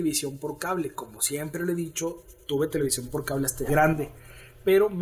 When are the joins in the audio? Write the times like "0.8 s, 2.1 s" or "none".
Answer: 3.7 s